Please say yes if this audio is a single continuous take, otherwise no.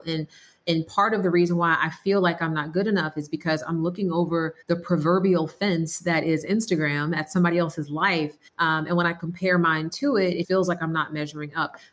no